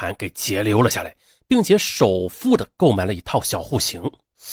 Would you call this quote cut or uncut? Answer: uncut